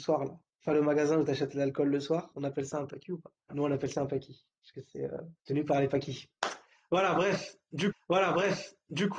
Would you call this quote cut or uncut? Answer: cut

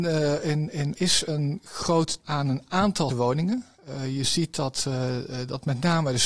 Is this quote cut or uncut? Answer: cut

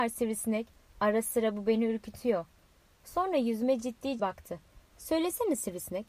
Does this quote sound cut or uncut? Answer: cut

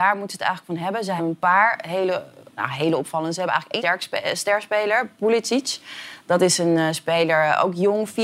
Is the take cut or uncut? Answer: cut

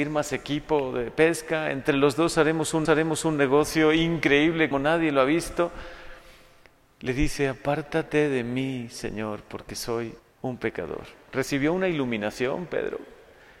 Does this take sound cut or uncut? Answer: cut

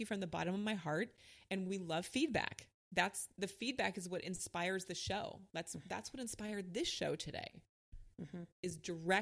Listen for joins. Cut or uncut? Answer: cut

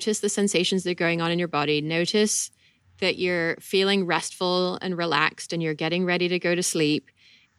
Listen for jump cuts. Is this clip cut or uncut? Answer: uncut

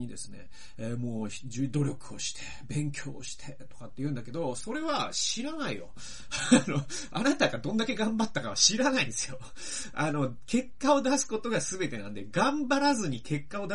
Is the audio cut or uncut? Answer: uncut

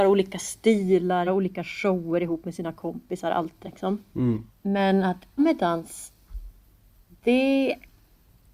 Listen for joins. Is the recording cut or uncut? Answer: cut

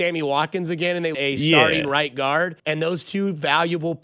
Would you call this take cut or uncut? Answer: cut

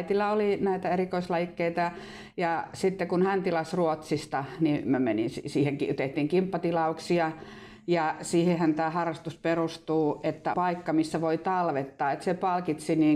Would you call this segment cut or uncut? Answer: cut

